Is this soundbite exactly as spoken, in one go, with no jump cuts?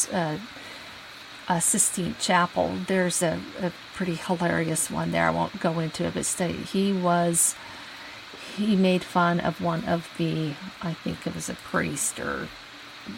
yes; 0 cuts

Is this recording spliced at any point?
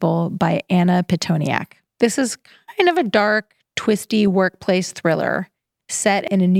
no; 0 cuts

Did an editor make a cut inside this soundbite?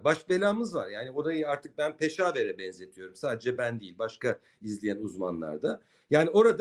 no; 0 cuts

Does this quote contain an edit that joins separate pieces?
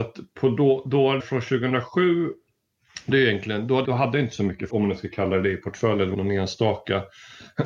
yes; 5 cuts; at 1.2 s, 3.1 s, 3.8 s, 4.7 s, 6.1 s

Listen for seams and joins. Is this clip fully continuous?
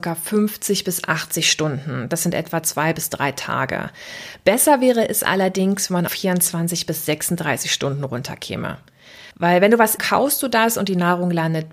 no; 3 cuts; at 6.1 s, 9.3 s, 10.0 s

